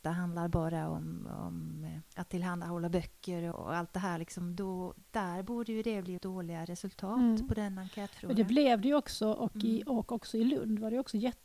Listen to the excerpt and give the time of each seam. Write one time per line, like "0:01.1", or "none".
0:02.1
0:03.5
0:06.2